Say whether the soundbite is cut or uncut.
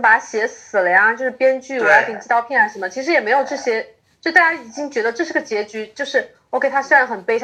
uncut